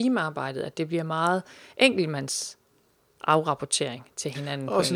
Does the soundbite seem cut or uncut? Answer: uncut